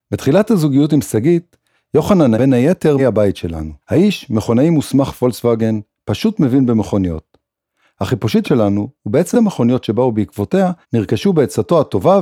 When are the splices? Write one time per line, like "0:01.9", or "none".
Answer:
0:02.3
0:03.0
0:03.8
0:08.4
0:09.3
0:10.8